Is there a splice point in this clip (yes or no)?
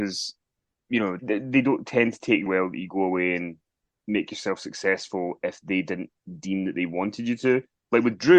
yes